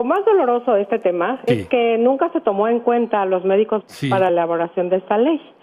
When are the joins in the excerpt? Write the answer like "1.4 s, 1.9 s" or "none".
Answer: 1.5 s, 3.8 s, 4.3 s